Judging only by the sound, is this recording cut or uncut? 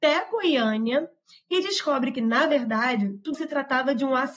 cut